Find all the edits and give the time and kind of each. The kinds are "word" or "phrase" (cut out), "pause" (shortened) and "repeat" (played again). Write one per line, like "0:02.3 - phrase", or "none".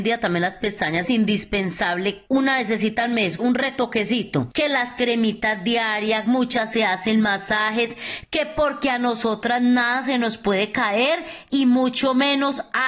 0:01.0 - phrase
0:03.4 - word